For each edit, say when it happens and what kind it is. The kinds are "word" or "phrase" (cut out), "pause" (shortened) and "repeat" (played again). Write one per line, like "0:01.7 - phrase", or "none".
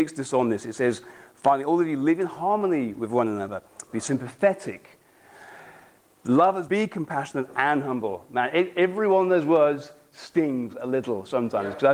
0:06.7 - word